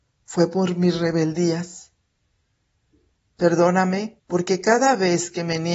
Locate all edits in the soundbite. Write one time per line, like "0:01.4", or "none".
0:04.2